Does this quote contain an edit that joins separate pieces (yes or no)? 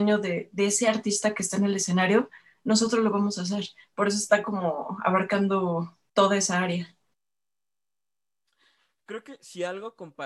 no